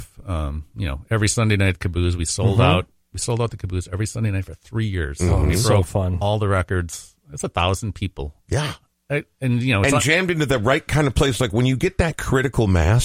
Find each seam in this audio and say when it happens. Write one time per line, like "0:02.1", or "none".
none